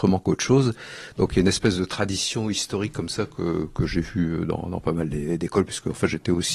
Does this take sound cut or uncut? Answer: uncut